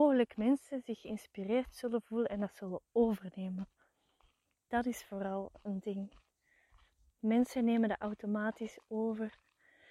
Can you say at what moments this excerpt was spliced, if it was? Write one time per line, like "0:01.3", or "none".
none